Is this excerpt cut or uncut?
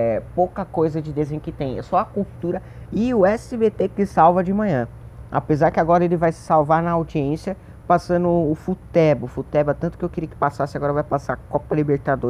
uncut